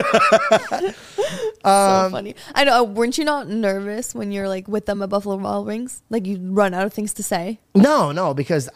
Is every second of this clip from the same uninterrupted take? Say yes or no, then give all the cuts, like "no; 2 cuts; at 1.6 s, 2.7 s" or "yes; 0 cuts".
yes; 0 cuts